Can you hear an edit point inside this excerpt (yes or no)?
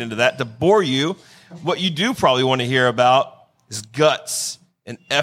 no